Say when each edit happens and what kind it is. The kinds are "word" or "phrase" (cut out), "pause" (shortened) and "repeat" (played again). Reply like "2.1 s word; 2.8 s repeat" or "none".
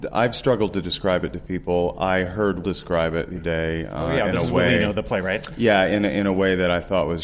2.6 s word; 3.4 s word